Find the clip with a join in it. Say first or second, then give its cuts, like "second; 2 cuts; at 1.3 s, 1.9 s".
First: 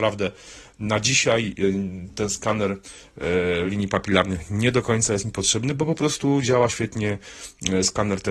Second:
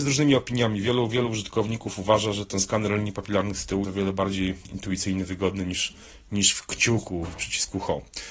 second; 1 cut; at 3.8 s